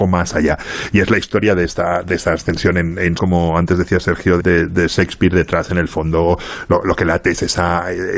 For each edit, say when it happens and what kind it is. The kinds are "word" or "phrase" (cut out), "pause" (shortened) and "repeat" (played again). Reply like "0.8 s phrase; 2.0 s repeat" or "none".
3.2 s phrase; 4.4 s word